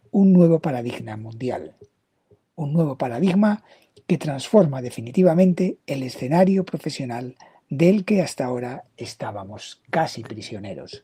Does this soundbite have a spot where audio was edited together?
no; 0 cuts

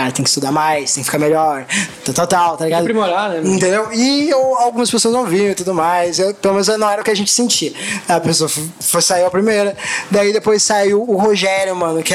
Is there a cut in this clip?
no; 0 cuts

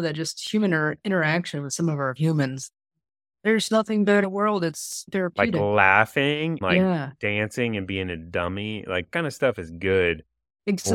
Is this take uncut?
no; 5 cuts; at 2.2 s, 4.2 s, 5.1 s, 6.6 s, 9.1 s

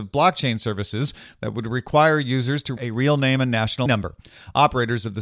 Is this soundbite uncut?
no; 2 cuts; at 2.8 s, 3.9 s

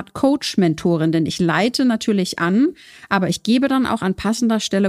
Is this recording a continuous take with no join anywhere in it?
yes; 0 cuts

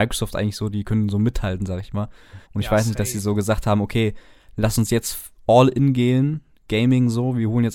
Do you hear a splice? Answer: yes; 1 cut; at 2.4 s

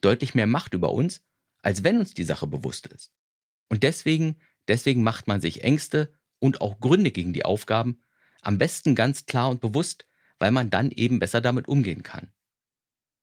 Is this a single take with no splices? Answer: yes; 0 cuts

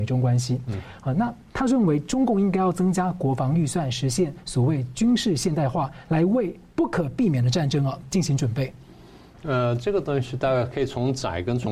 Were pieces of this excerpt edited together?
no; 0 cuts

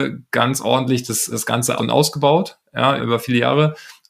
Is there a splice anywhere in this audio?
yes; 3 cuts; at 1.3 s, 1.8 s, 3.0 s

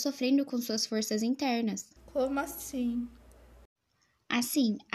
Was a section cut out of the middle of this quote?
yes; 1 cut; at 2.0 s

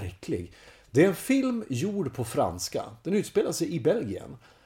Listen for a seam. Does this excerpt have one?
no; 0 cuts

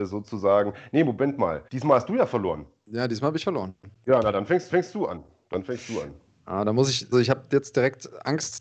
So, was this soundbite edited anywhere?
yes; 3 cuts; at 1.7 s, 4.7 s, 7.1 s

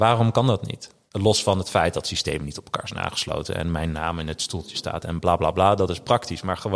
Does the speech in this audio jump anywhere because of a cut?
no; 0 cuts

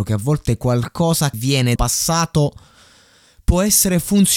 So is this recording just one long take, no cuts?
no; 2 cuts; at 1.3 s, 1.8 s

